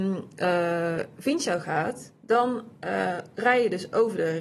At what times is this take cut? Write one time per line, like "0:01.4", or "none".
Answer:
none